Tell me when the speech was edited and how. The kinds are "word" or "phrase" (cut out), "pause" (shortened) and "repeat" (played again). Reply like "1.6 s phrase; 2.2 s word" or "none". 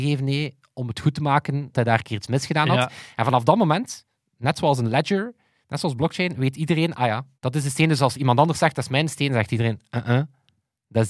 1.7 s word; 7.3 s pause